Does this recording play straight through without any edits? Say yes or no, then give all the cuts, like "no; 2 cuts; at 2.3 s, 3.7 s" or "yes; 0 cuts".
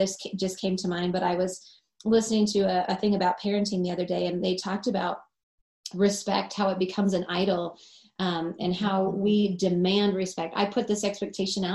yes; 0 cuts